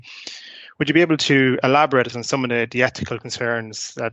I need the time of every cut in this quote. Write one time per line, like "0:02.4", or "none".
0:02.1